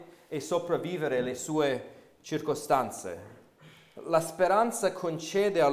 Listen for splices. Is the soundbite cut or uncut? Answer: uncut